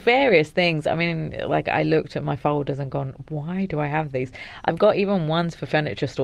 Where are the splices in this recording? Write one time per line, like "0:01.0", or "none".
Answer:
none